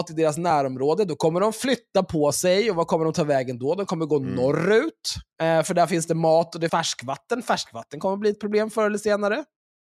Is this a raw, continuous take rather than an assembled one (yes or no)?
no